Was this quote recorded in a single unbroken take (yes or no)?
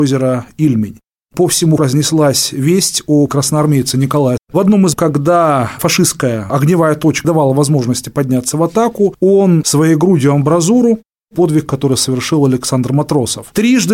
no